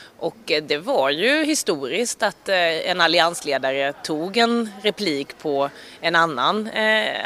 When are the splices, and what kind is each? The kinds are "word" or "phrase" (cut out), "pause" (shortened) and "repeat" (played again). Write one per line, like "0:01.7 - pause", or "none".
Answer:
none